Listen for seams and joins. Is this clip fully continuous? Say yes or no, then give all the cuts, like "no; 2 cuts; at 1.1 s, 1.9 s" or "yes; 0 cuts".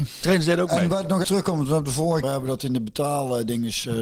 no; 2 cuts; at 1.2 s, 2.2 s